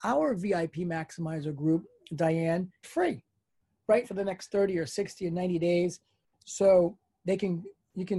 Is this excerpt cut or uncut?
cut